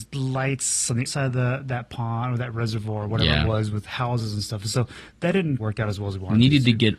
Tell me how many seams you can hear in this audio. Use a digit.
2